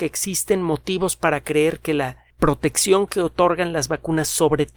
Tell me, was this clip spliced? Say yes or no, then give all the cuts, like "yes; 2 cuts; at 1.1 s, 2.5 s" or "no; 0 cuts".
yes; 1 cut; at 2.3 s